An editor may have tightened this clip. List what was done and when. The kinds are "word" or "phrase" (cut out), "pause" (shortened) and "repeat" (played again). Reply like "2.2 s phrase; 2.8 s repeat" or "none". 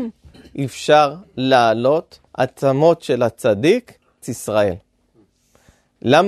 2.3 s pause; 4.2 s word